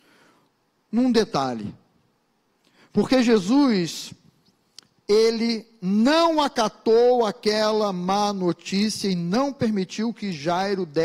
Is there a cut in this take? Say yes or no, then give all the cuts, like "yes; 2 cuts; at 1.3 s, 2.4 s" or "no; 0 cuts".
no; 0 cuts